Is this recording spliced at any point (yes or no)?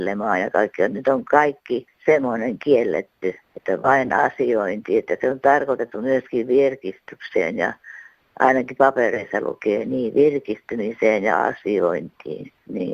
no